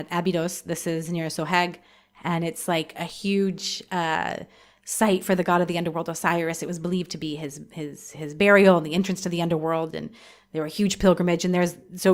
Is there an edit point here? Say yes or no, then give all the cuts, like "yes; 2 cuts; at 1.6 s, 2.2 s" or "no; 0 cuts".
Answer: no; 0 cuts